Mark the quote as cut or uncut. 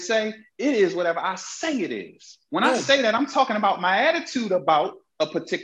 uncut